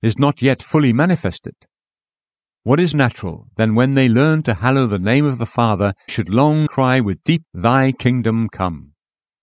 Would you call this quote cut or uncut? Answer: cut